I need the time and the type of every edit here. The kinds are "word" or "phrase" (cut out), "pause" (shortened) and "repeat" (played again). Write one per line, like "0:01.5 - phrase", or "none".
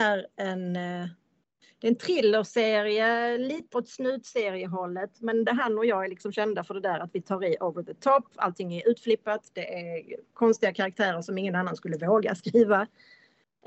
0:03.7 - word
0:05.5 - word
0:10.3 - pause